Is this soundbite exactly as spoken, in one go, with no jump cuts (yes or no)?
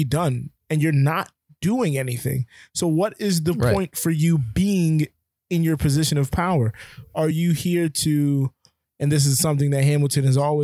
yes